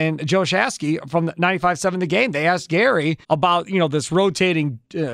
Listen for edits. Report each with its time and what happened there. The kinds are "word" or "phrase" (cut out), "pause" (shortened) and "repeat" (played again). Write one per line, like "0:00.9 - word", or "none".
0:03.2 - pause